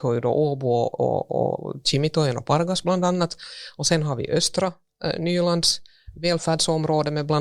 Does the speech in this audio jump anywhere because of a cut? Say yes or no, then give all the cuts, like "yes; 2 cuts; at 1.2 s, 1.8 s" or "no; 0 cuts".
no; 0 cuts